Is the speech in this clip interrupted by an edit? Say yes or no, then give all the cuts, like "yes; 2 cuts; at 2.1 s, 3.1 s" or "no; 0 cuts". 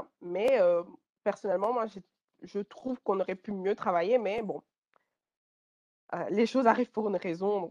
no; 0 cuts